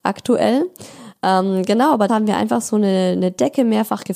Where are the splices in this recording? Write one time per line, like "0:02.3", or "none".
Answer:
0:02.1